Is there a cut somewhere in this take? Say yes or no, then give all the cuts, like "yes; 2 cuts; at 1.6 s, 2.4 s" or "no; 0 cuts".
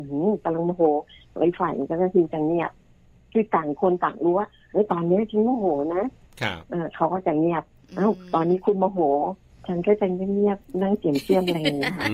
no; 0 cuts